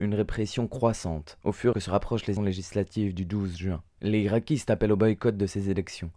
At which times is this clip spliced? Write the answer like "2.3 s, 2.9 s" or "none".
1.7 s, 2.4 s, 3.9 s